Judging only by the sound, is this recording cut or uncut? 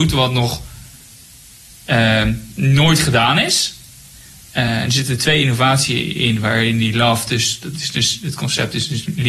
uncut